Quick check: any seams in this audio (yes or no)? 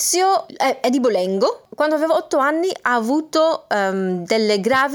no